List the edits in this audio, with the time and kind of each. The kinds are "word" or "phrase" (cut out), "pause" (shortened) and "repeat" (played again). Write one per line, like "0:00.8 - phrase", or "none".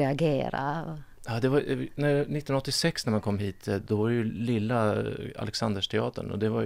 none